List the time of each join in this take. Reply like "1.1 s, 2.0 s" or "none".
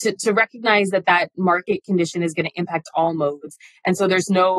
none